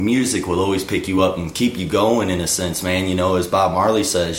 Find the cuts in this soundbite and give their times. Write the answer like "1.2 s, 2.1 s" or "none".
none